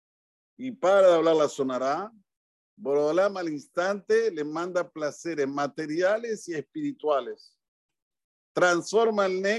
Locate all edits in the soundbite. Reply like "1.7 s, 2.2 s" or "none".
none